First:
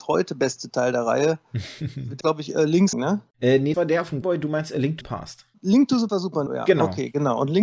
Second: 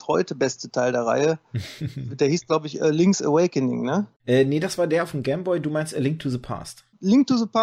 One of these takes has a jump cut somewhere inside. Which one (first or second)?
first